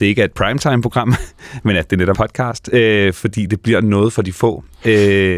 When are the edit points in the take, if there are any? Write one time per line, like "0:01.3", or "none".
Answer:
0:02.1